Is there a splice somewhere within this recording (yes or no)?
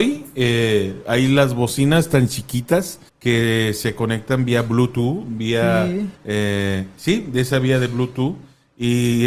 yes